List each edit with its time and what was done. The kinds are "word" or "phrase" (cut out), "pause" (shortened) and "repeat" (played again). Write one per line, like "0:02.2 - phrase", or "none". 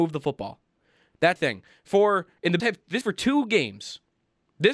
0:01.4 - word
0:02.6 - word
0:03.0 - word